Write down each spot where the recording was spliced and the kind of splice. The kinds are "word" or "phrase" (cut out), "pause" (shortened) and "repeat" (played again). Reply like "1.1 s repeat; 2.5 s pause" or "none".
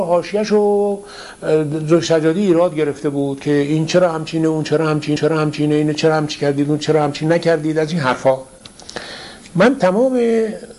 5.2 s repeat